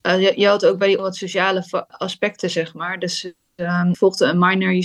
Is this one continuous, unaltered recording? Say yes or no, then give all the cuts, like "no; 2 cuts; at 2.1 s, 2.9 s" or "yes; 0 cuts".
no; 3 cuts; at 1.0 s, 1.9 s, 3.9 s